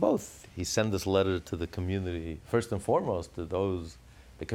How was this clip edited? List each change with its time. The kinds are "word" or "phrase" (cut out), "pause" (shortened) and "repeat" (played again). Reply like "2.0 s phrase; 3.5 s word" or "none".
none